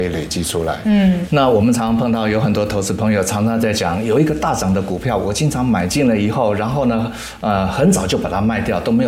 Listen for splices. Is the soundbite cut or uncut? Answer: uncut